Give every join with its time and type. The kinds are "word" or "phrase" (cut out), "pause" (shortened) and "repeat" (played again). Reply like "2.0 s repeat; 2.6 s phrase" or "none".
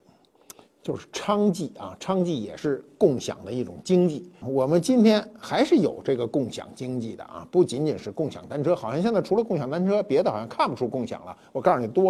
4.3 s pause